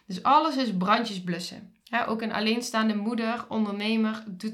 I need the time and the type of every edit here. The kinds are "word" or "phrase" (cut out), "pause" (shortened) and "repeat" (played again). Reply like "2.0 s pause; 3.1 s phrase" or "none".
1.8 s pause